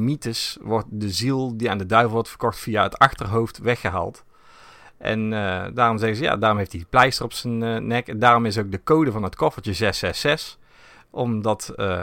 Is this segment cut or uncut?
uncut